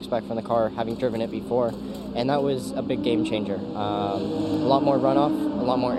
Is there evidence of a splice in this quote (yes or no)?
no